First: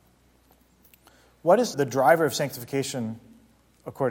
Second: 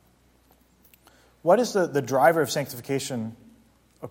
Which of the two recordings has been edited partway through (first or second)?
first